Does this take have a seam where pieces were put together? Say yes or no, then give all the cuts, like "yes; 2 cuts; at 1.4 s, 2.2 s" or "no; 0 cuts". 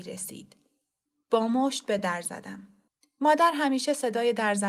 no; 0 cuts